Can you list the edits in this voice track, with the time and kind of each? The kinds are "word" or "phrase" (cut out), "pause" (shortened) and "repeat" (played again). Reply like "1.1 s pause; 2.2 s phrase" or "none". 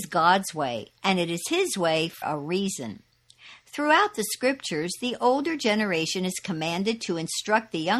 2.2 s word